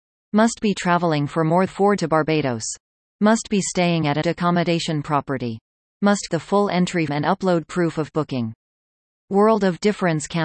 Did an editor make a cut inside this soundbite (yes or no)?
yes